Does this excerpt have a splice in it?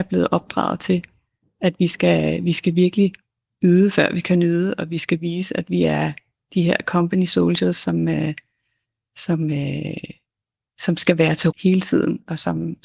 yes; 1 cut; at 11.5 s

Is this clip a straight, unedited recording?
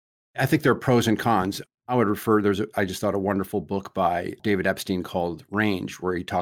yes; 0 cuts

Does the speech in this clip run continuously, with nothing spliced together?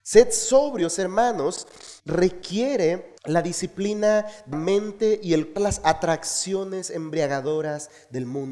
no; 4 cuts; at 2.0 s, 3.2 s, 4.5 s, 5.6 s

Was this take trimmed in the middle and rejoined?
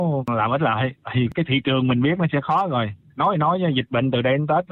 yes; 1 cut; at 1.3 s

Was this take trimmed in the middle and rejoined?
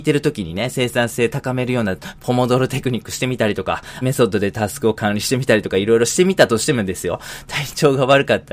yes; 1 cut; at 4.0 s

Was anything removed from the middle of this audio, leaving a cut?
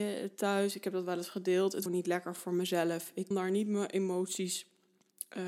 yes; 2 cuts; at 1.9 s, 3.3 s

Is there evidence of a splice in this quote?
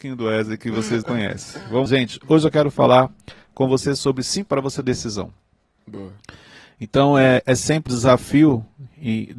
yes; 6 cuts; at 1.0 s, 1.9 s, 4.5 s, 4.8 s, 7.4 s, 7.9 s

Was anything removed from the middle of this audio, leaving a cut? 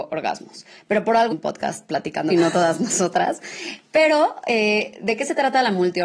yes; 2 cuts; at 1.3 s, 2.3 s

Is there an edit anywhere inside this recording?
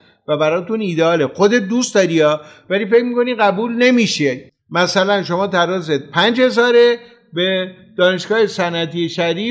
yes; 1 cut; at 4.5 s

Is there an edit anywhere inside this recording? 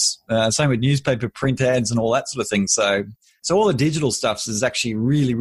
no; 0 cuts

